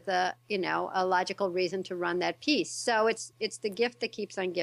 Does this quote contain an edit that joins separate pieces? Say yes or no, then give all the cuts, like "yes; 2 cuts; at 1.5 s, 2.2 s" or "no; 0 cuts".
yes; 1 cut; at 3.3 s